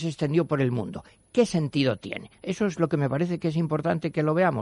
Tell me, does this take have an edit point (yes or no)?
no